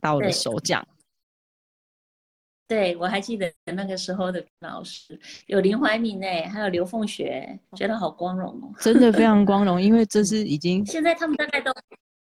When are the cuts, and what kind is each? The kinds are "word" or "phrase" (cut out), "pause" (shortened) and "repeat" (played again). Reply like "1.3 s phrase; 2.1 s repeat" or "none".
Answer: 3.6 s pause; 4.5 s pause; 7.6 s pause